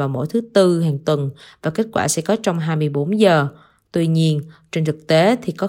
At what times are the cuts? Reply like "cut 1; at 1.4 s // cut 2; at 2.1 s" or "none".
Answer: none